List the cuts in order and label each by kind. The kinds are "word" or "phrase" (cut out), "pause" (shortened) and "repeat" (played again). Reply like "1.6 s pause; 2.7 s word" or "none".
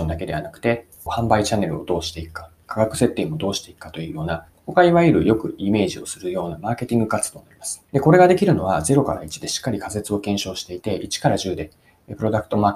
1.1 s phrase; 7.9 s pause